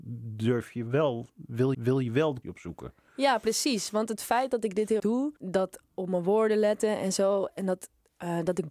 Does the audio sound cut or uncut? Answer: cut